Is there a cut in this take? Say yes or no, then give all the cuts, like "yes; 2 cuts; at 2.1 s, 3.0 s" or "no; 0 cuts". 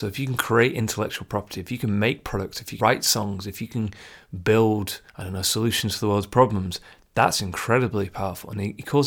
yes; 2 cuts; at 2.8 s, 5.1 s